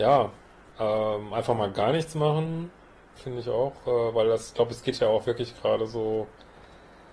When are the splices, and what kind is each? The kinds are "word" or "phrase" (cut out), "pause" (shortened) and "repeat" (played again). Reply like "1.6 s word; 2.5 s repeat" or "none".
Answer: none